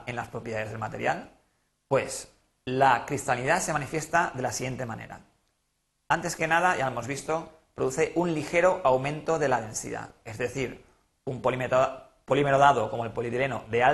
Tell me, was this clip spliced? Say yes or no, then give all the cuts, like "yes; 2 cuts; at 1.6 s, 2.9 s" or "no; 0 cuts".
no; 0 cuts